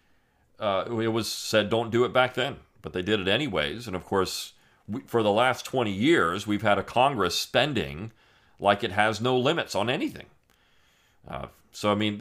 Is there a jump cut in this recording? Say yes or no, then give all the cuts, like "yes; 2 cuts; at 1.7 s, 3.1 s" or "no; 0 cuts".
no; 0 cuts